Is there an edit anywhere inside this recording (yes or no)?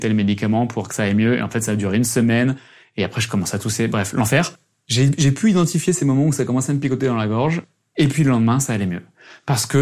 no